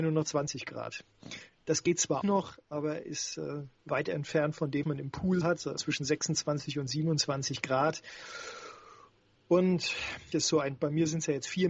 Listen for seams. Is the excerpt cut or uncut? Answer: cut